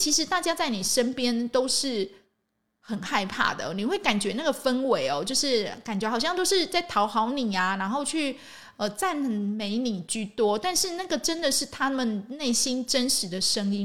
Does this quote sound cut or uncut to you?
uncut